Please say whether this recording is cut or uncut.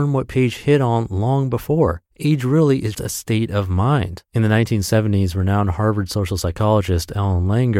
cut